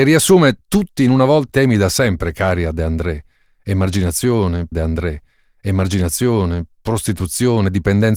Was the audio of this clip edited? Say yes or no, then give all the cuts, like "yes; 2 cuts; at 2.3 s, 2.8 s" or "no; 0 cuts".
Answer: yes; 2 cuts; at 1.5 s, 4.7 s